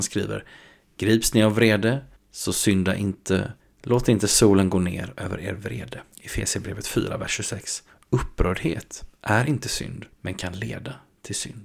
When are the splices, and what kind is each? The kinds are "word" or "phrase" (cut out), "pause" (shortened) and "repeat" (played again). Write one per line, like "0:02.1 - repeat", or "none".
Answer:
0:02.1 - pause
0:03.6 - pause
0:06.1 - pause
0:10.1 - pause